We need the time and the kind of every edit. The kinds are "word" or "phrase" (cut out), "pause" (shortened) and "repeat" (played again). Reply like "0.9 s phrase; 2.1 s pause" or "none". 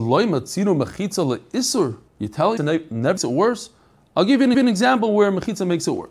2.1 s pause; 2.6 s phrase; 3.2 s word; 4.5 s repeat